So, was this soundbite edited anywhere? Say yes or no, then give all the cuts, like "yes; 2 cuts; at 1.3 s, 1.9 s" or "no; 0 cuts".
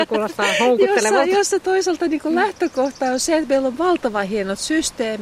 no; 0 cuts